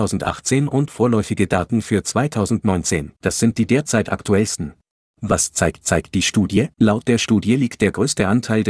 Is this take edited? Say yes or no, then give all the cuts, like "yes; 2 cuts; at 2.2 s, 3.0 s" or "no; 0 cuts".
yes; 4 cuts; at 3.2 s, 5.1 s, 5.8 s, 6.7 s